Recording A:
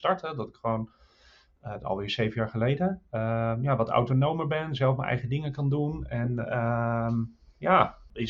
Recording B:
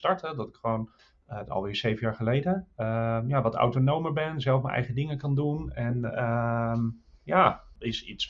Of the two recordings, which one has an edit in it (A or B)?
B